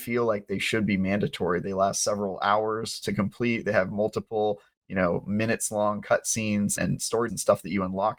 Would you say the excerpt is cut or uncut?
cut